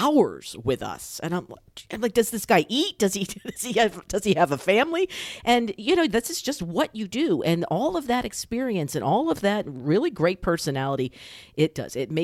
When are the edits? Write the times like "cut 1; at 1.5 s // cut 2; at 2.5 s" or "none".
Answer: none